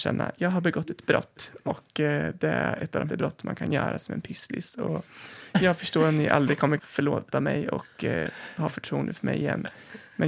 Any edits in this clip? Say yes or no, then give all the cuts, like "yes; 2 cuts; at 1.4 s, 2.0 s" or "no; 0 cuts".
yes; 2 cuts; at 3.1 s, 6.8 s